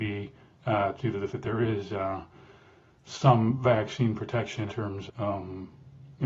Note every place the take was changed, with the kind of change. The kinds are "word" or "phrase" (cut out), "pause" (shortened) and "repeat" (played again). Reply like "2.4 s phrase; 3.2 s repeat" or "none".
1.0 s word; 1.3 s word; 4.7 s word; 5.1 s word